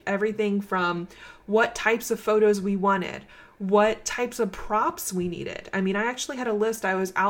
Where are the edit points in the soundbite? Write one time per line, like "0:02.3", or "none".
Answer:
none